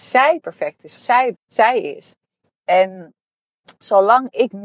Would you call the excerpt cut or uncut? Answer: cut